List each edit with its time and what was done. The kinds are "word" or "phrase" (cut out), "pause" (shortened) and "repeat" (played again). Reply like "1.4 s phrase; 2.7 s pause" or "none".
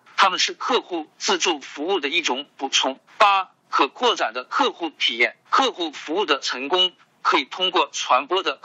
3.1 s pause; 5.4 s pause